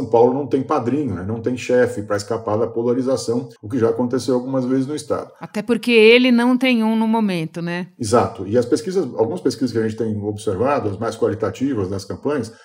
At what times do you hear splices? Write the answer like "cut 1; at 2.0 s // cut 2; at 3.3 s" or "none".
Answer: cut 1; at 3.6 s